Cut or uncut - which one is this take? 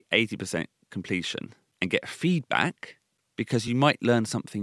uncut